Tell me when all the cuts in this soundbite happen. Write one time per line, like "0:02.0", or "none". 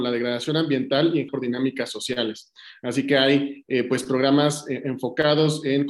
0:01.3